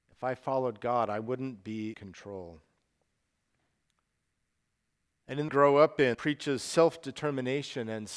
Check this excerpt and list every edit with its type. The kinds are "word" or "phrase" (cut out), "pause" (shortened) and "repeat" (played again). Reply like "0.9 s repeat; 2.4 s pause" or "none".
1.9 s word; 5.5 s phrase; 6.1 s word